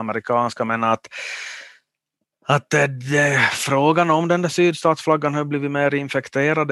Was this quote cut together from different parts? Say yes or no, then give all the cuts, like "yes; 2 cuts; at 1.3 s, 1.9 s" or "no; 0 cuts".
no; 0 cuts